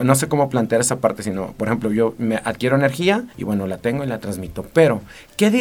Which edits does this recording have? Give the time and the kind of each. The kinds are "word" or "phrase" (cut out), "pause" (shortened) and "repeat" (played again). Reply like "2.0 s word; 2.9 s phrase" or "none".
3.3 s pause

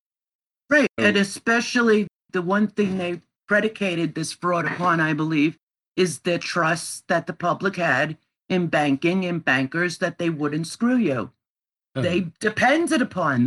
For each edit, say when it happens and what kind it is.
none

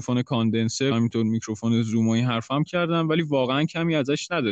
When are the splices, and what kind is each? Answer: 0.9 s word; 2.7 s word

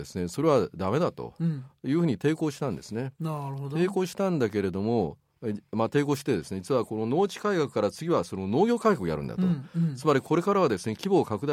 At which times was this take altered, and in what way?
none

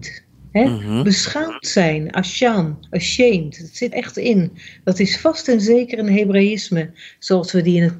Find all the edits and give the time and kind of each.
2.9 s pause; 3.9 s word

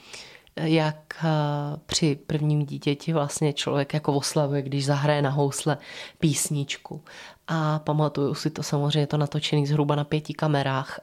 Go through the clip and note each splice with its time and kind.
none

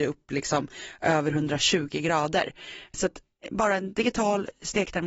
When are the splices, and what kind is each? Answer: none

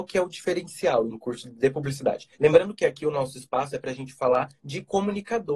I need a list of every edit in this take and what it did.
1.1 s word; 2.3 s pause; 4.6 s pause

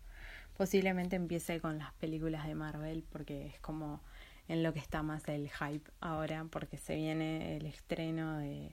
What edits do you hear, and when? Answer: none

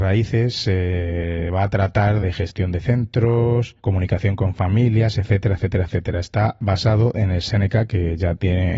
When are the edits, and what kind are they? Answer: 2.2 s phrase; 3.8 s pause

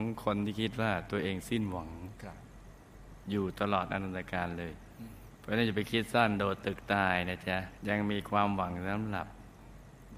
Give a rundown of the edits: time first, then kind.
7.8 s pause

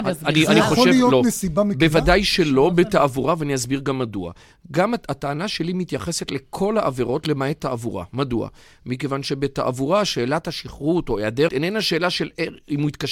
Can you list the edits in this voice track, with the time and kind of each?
11.5 s word

